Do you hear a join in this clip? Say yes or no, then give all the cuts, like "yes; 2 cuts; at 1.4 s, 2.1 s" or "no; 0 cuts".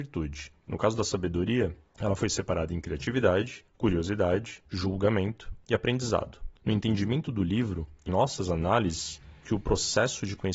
yes; 2 cuts; at 8.1 s, 9.4 s